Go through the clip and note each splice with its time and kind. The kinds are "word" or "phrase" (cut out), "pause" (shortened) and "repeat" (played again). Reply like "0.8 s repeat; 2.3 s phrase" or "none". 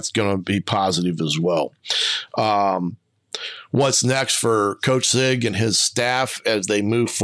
none